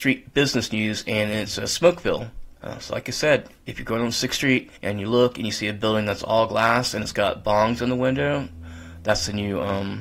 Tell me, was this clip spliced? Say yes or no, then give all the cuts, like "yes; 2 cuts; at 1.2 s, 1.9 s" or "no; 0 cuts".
yes; 2 cuts; at 2.6 s, 4.8 s